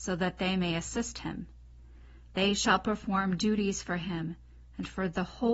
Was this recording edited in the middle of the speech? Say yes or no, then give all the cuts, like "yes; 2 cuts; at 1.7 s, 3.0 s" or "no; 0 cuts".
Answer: no; 0 cuts